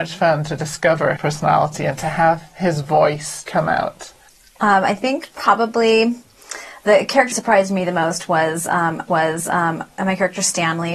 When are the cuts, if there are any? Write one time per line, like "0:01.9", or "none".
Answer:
0:01.2
0:03.5
0:04.3
0:07.3
0:09.1